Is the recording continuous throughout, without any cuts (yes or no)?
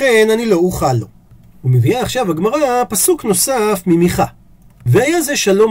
yes